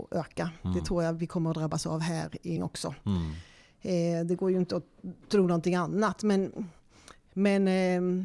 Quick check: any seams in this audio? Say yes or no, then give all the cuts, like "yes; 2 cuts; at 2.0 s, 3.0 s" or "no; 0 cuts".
yes; 1 cut; at 2.6 s